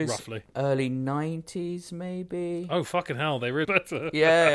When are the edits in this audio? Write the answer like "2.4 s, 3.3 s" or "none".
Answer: 3.6 s